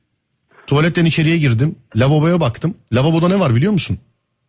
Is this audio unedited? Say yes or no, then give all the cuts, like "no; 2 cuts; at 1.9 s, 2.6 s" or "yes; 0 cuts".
yes; 0 cuts